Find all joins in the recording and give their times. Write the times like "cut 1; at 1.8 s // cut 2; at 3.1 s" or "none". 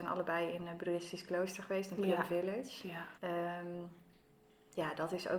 cut 1; at 3.2 s